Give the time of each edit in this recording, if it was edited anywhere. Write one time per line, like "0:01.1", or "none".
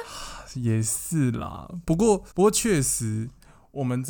0:02.3